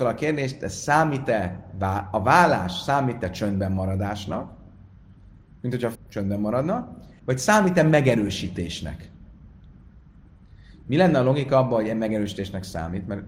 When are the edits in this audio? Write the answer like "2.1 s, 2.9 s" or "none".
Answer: 5.9 s